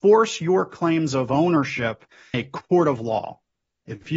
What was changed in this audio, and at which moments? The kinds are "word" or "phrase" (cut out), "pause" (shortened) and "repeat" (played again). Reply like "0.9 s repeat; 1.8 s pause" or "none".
2.3 s word